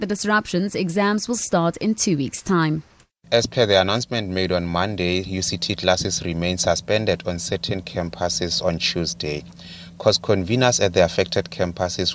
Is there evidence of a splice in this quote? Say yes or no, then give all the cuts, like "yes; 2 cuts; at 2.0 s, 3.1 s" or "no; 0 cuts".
no; 0 cuts